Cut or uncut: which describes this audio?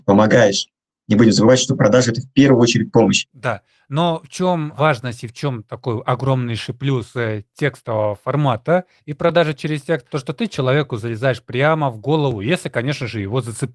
uncut